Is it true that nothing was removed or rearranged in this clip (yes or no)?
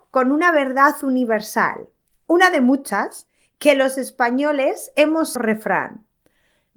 no